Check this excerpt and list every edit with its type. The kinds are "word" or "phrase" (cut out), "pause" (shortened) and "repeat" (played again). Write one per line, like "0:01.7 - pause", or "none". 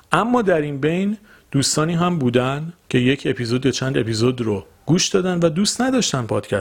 0:02.8 - pause
0:04.7 - pause